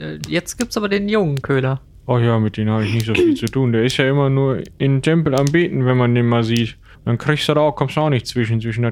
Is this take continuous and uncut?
no; 2 cuts; at 1.9 s, 6.9 s

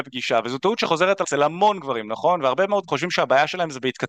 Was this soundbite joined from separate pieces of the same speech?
yes; 2 cuts; at 1.2 s, 2.9 s

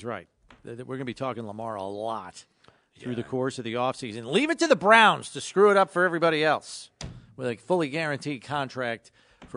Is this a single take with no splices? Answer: yes; 0 cuts

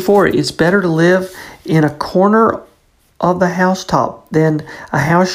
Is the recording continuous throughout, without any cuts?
yes; 0 cuts

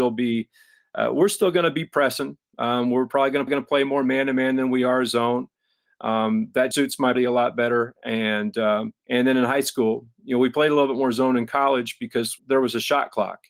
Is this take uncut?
no; 5 cuts; at 3.5 s, 6.7 s, 7.2 s, 9.0 s, 12.4 s

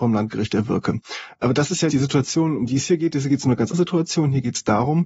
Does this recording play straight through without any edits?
no; 2 cuts; at 1.9 s, 3.7 s

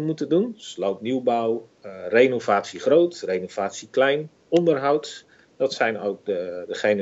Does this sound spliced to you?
no; 0 cuts

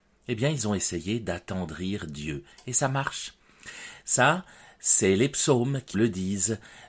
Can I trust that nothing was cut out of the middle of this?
no; 1 cut; at 5.9 s

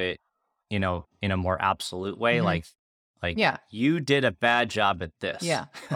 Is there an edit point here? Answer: no; 0 cuts

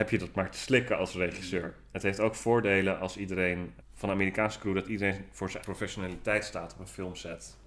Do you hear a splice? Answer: yes; 2 cuts; at 3.8 s, 5.6 s

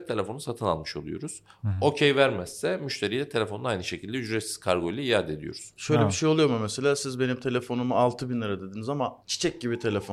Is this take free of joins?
no; 1 cut; at 9.2 s

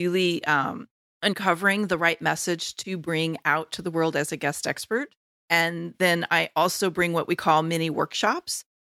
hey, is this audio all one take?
yes; 0 cuts

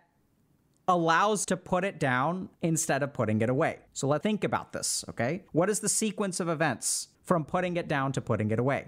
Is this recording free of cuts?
no; 6 cuts; at 1.4 s, 2.6 s, 3.9 s, 4.2 s, 5.5 s, 7.1 s

